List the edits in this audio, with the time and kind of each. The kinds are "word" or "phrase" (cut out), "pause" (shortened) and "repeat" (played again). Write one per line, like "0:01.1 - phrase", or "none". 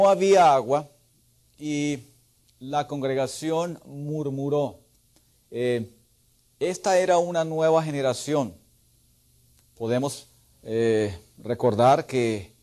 none